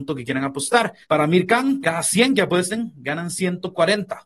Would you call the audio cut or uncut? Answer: cut